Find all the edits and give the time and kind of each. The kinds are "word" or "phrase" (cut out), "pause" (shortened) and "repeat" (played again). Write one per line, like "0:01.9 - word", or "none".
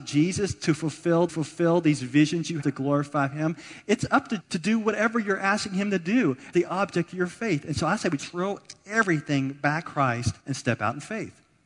0:01.3 - repeat
0:02.6 - word
0:04.4 - word
0:06.5 - word
0:08.2 - word
0:09.8 - word
0:10.4 - pause